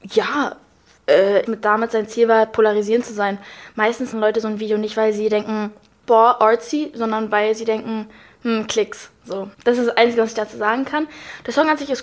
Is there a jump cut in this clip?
yes; 3 cuts; at 1.5 s, 4.1 s, 9.5 s

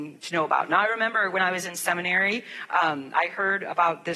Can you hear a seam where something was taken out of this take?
no; 0 cuts

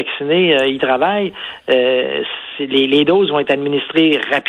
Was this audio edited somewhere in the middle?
no; 0 cuts

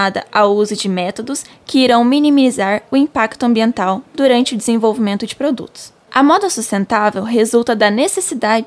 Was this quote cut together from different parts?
no; 0 cuts

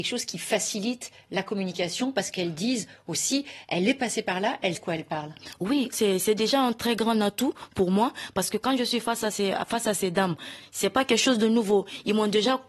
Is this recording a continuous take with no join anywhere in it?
no; 2 cuts; at 4.7 s, 5.9 s

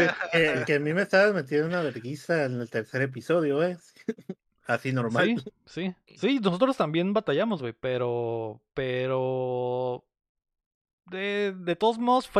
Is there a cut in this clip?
no; 0 cuts

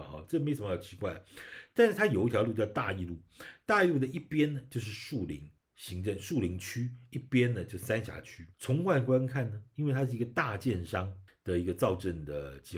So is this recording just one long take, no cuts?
no; 3 cuts; at 5.6 s, 8.5 s, 11.3 s

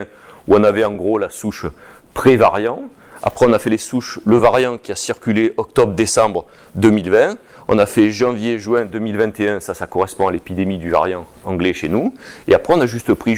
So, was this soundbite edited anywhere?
no; 0 cuts

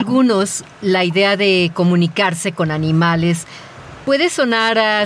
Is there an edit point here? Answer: no; 0 cuts

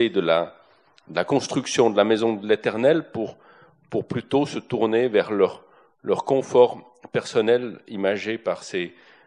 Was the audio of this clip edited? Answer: no; 0 cuts

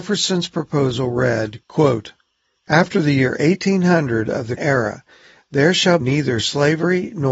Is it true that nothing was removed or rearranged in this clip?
no; 3 cuts; at 1.6 s, 4.6 s, 6.0 s

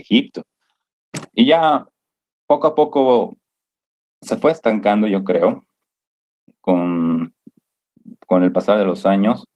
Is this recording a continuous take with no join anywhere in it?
yes; 0 cuts

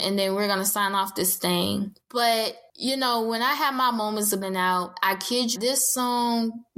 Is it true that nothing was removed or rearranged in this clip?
no; 2 cuts; at 4.4 s, 5.6 s

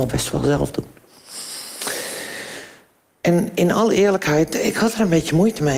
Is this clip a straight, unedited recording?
yes; 0 cuts

